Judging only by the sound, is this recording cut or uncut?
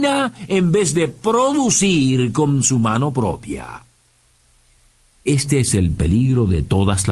uncut